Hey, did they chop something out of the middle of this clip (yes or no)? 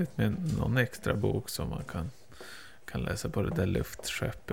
no